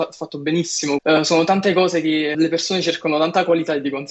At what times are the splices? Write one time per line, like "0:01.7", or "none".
0:01.0
0:02.3